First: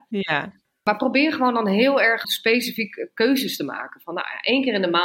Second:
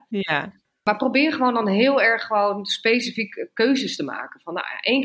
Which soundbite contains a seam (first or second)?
first